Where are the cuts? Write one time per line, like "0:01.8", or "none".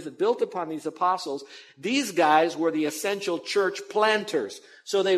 none

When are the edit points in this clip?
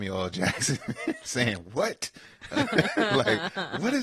none

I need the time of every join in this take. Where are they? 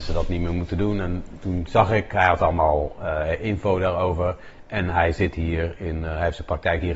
none

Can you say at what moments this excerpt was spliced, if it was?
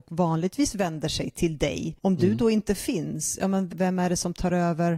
0:03.7

